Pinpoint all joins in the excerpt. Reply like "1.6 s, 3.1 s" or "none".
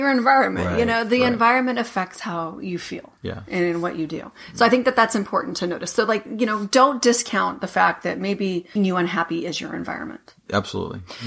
8.8 s